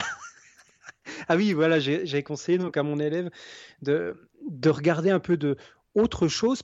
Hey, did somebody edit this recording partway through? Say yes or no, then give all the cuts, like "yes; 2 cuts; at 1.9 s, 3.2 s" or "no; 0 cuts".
no; 0 cuts